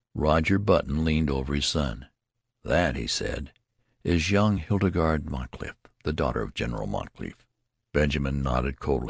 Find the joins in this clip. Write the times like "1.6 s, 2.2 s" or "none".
none